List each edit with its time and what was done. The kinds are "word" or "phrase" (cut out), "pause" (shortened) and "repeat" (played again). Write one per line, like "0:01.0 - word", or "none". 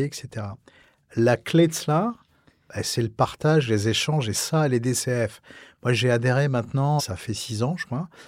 0:07.0 - word